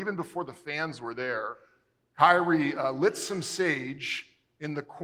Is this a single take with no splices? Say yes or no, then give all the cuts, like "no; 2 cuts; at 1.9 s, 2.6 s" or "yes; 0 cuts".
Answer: yes; 0 cuts